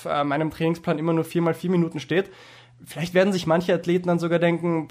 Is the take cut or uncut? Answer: uncut